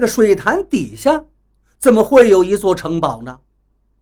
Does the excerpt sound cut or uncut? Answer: uncut